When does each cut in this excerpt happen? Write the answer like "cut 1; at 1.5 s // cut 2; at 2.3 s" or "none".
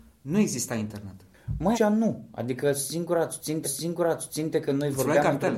cut 1; at 1.7 s // cut 2; at 3.6 s